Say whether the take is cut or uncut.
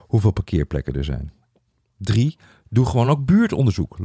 uncut